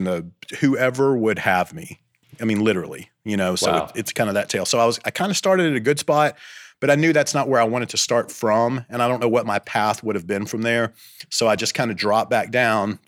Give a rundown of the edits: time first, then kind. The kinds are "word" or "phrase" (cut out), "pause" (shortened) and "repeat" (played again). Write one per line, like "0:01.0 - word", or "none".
none